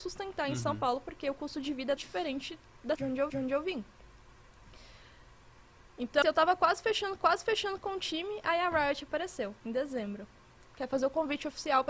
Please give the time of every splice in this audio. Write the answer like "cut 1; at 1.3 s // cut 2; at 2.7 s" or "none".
cut 1; at 2.0 s // cut 2; at 3.0 s // cut 3; at 3.3 s // cut 4; at 6.2 s // cut 5; at 7.2 s // cut 6; at 9.6 s // cut 7; at 10.7 s